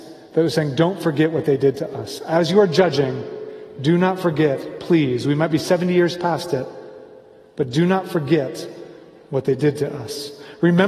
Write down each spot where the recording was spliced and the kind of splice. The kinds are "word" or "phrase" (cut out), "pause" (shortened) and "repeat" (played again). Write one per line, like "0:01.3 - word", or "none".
none